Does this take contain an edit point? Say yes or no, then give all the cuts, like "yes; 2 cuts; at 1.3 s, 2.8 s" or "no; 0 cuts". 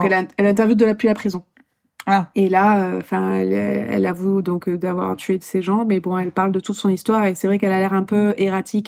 no; 0 cuts